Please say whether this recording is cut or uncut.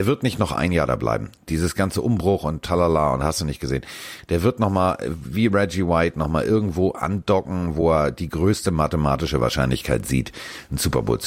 uncut